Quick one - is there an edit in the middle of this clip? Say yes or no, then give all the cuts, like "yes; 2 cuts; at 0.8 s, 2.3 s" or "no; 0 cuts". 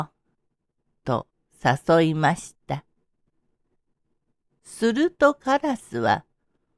no; 0 cuts